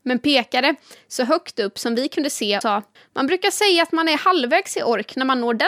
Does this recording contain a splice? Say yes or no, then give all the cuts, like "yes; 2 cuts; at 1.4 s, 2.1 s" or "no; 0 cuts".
yes; 2 cuts; at 2.6 s, 3.0 s